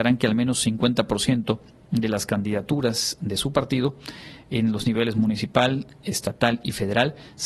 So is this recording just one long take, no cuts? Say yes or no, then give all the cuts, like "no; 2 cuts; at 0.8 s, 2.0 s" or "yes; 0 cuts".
yes; 0 cuts